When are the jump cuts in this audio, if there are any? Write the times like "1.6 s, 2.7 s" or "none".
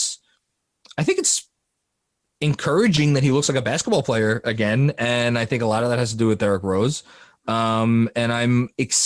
none